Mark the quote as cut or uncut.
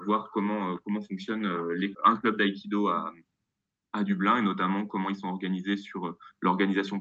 cut